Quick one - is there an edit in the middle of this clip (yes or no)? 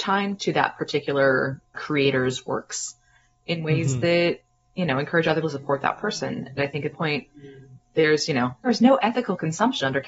yes